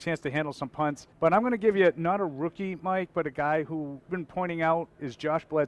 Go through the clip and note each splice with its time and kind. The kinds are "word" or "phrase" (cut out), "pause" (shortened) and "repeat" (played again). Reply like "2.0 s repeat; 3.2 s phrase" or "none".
1.1 s pause; 4.1 s word